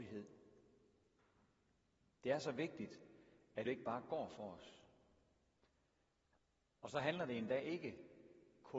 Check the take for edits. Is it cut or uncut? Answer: cut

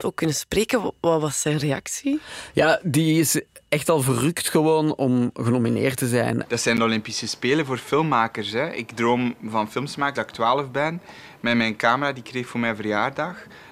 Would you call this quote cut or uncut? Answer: cut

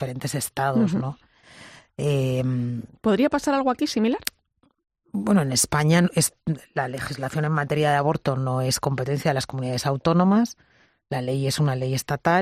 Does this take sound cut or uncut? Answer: uncut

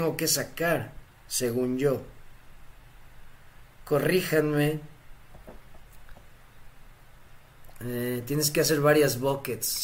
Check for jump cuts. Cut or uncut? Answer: uncut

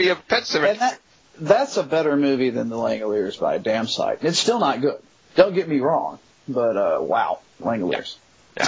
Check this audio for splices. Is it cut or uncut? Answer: uncut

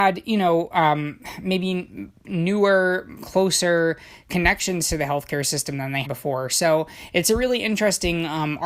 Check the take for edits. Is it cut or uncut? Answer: cut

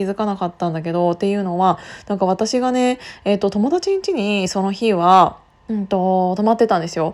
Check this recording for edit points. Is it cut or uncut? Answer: cut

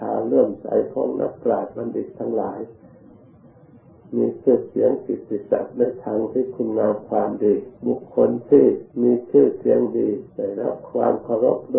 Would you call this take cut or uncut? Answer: cut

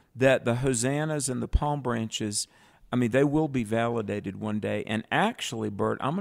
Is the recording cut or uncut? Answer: uncut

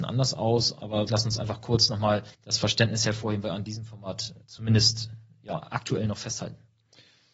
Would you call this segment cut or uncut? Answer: cut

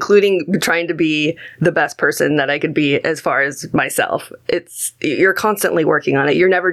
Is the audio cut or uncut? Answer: uncut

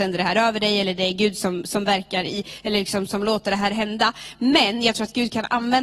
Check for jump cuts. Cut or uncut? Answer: uncut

